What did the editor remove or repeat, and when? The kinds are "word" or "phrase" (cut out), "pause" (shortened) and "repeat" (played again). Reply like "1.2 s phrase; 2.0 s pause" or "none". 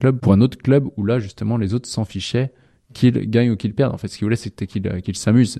none